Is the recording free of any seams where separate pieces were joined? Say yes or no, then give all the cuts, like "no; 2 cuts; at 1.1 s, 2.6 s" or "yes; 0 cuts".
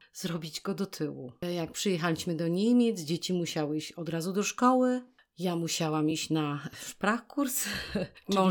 yes; 0 cuts